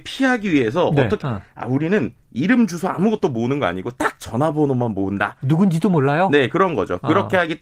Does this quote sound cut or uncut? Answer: cut